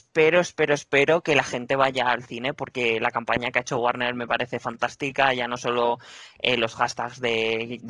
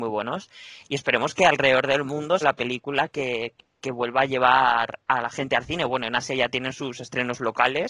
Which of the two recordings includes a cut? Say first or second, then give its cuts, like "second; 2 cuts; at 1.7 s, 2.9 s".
second; 1 cut; at 2.4 s